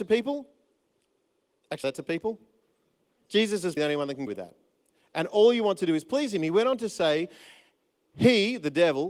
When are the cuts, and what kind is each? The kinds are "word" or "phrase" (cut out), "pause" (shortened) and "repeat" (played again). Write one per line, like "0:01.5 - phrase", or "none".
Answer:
0:01.8 - phrase
0:03.8 - word
0:04.3 - phrase